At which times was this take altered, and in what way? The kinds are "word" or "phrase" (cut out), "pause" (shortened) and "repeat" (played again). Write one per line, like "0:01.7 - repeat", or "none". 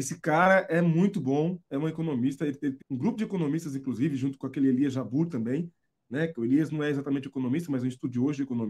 0:02.8 - word